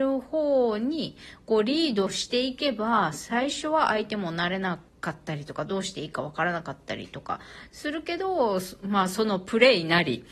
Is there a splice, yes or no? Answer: yes